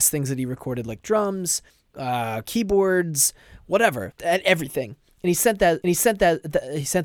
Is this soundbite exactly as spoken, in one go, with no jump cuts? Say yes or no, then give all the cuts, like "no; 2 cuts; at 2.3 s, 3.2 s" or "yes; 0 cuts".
no; 3 cuts; at 1.7 s, 4.1 s, 5.8 s